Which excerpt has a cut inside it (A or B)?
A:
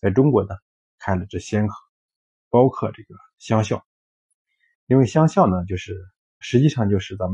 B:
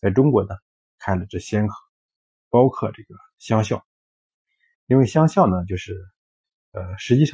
A